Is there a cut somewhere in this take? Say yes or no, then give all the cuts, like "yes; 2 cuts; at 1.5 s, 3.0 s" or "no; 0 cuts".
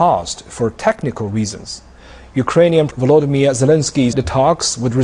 yes; 2 cuts; at 2.9 s, 4.1 s